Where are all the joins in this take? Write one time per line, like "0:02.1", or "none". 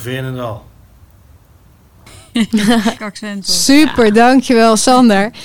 0:03.0